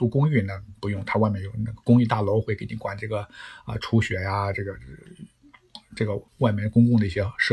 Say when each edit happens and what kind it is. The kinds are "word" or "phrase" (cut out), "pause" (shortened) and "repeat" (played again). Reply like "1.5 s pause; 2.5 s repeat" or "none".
6.3 s pause